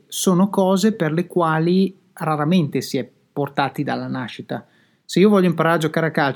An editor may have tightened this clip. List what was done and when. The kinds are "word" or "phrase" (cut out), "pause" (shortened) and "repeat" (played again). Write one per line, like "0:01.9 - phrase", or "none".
none